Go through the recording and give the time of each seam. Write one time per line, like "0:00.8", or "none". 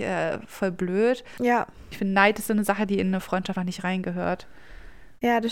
0:03.6

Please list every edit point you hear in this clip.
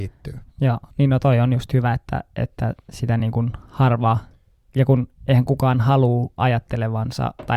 none

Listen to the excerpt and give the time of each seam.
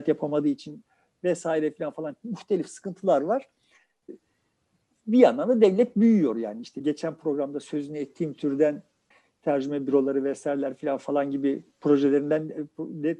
none

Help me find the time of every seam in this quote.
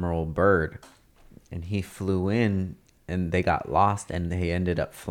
none

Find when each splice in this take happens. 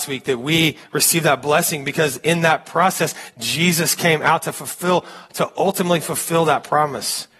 none

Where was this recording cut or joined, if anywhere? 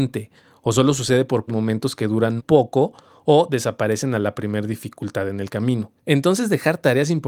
0:01.5
0:02.4
0:06.0

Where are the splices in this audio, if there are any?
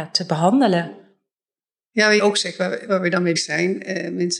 0:02.2
0:02.9
0:03.4

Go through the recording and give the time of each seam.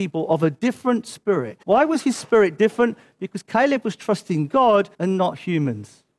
0:01.6
0:04.9

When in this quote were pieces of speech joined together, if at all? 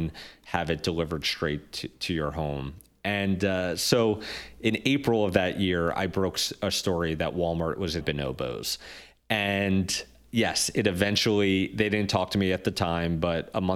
0:08.0

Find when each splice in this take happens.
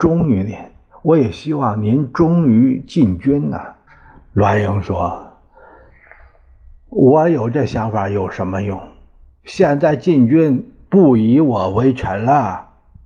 none

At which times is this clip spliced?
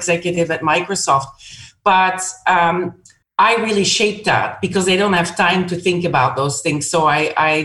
0:03.2

